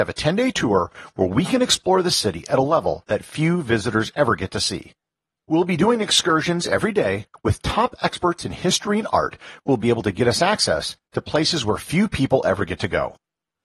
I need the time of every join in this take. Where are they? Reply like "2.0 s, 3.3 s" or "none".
none